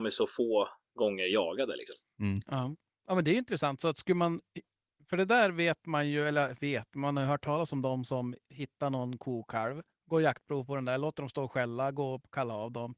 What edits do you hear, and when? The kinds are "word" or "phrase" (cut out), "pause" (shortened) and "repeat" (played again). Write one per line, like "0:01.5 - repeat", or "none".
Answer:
none